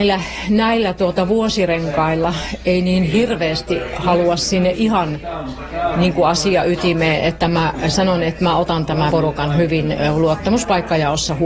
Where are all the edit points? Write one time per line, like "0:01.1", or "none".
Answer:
0:09.1